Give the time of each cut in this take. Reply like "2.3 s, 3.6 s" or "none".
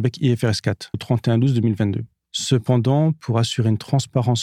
0.9 s